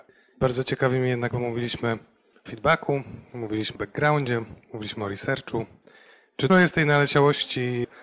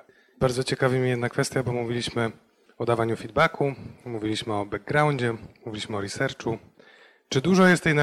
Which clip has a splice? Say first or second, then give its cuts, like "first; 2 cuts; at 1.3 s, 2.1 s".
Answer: first; 4 cuts; at 1.3 s, 2.5 s, 3.7 s, 6.5 s